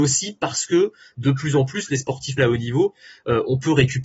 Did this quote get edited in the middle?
yes; 1 cut; at 2.4 s

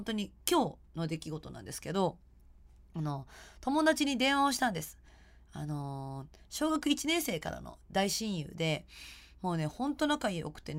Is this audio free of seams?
yes; 0 cuts

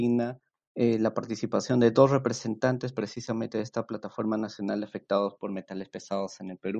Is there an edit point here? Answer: no; 0 cuts

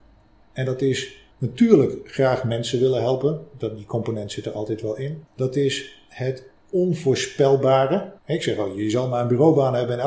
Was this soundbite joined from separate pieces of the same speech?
yes; 3 cuts; at 1.3 s, 5.3 s, 8.2 s

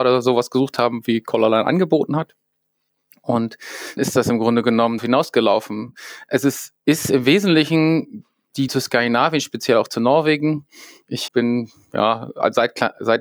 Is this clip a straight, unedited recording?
no; 5 cuts; at 4.0 s, 5.0 s, 6.8 s, 8.7 s, 11.3 s

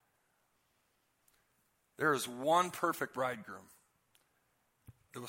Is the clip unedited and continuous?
yes; 0 cuts

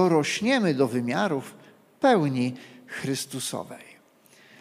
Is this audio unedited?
yes; 0 cuts

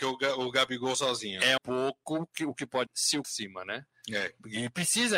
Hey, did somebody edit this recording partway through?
yes; 4 cuts; at 0.9 s, 1.6 s, 2.9 s, 3.2 s

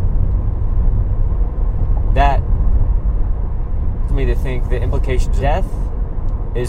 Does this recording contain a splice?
yes; 2 cuts; at 4.1 s, 5.4 s

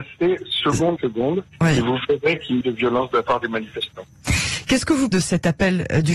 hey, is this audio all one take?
no; 3 cuts; at 1.0 s, 2.6 s, 5.1 s

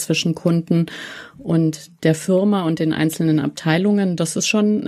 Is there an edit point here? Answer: no; 0 cuts

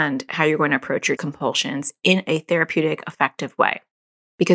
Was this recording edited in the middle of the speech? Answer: yes; 1 cut; at 1.2 s

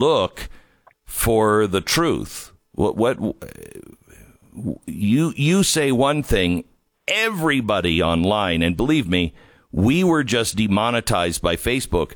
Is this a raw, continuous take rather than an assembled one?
yes; 0 cuts

